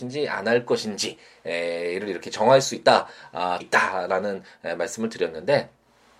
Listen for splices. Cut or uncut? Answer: cut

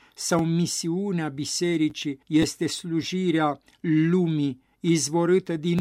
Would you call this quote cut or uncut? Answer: cut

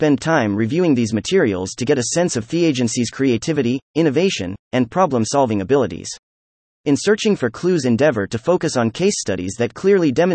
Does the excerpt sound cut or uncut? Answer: uncut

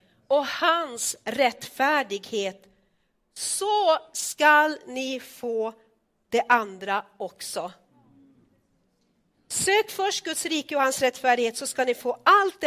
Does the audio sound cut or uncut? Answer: uncut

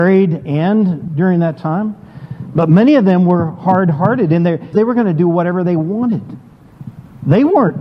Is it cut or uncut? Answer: cut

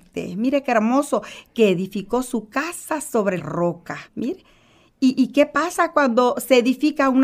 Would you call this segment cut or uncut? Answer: cut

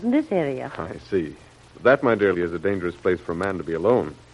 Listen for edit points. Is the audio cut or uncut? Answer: cut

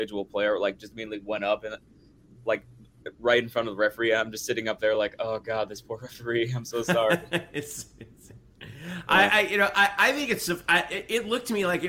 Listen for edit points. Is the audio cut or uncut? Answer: uncut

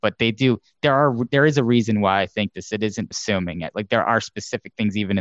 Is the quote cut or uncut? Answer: cut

